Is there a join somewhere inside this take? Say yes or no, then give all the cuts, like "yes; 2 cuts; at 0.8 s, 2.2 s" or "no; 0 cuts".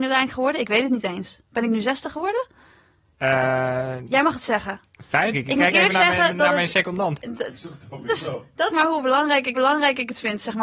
yes; 4 cuts; at 5.3 s, 8.1 s, 8.7 s, 9.5 s